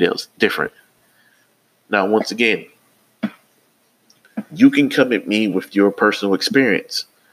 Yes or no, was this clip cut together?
no